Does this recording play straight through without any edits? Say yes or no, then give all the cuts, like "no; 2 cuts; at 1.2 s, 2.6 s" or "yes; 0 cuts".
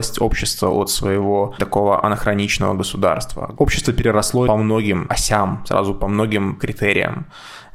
no; 2 cuts; at 1.6 s, 4.5 s